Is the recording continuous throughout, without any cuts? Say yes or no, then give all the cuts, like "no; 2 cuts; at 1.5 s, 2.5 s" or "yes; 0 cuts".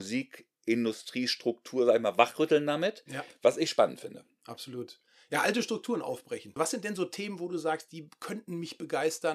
yes; 0 cuts